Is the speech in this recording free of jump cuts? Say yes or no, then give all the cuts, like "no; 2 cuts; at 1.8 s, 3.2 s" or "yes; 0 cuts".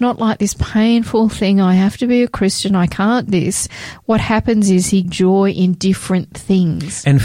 no; 2 cuts; at 3.3 s, 5.0 s